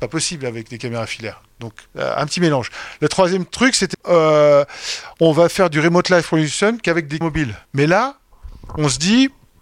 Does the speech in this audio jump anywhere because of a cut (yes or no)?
yes